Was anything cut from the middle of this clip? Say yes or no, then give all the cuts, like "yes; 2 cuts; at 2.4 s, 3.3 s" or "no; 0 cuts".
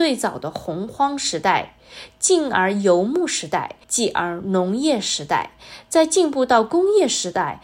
yes; 1 cut; at 3.8 s